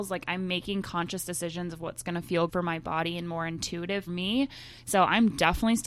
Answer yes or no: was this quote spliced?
yes